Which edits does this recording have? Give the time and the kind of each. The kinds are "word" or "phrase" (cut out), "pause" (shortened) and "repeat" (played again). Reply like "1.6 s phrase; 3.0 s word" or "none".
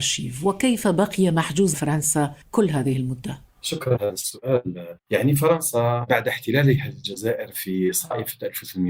1.7 s word; 2.4 s pause; 4.0 s phrase; 5.0 s pause